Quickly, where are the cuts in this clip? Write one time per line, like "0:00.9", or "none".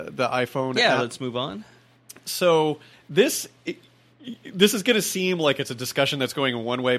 0:02.9